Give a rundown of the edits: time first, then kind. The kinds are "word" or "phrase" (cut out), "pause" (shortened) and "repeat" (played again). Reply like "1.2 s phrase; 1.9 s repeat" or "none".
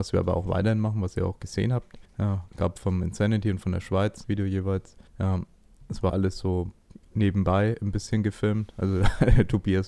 2.1 s pause; 2.5 s word; 4.2 s phrase; 5.1 s pause; 6.1 s word; 7.0 s pause